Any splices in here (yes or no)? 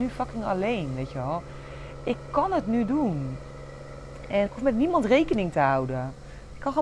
yes